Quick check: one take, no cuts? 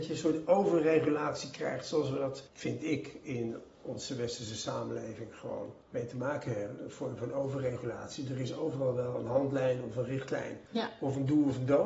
no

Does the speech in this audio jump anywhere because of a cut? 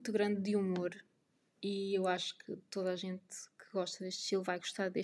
no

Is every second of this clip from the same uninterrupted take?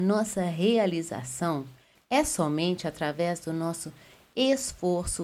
yes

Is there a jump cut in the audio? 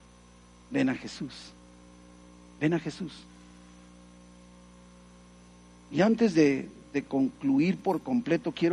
no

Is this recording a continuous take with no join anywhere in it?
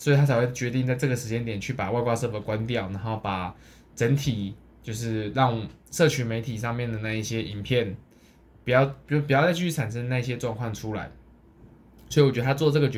yes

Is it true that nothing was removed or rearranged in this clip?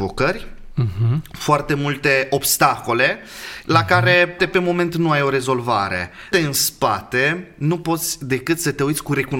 no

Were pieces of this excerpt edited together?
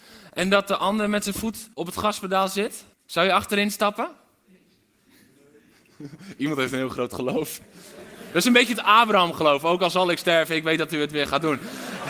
yes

